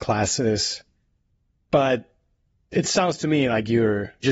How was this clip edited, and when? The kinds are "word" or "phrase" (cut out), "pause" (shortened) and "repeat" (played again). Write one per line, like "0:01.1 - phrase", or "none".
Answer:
none